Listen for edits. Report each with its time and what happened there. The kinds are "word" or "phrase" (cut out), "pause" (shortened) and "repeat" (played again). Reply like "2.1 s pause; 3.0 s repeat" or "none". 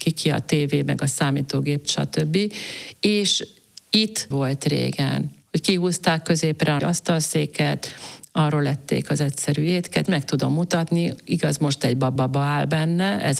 1.8 s word; 4.3 s word; 5.4 s pause; 6.8 s word; 10.1 s word; 12.2 s repeat